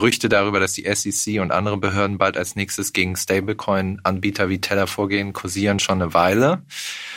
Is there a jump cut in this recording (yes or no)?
no